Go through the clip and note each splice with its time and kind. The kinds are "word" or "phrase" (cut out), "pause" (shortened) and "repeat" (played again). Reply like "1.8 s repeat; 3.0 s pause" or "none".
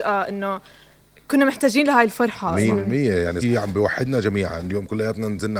3.4 s phrase